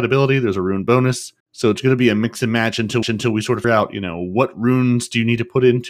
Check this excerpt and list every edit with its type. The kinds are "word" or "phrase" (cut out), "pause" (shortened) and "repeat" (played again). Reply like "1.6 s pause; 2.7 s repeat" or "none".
1.4 s pause; 3.0 s repeat; 3.6 s word